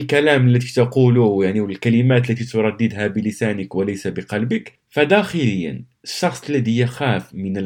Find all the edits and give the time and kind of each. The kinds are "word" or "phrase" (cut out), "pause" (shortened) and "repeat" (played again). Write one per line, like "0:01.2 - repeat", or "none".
none